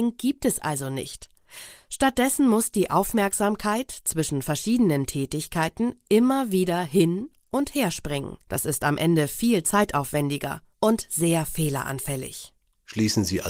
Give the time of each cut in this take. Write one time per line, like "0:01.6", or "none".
0:08.4
0:10.7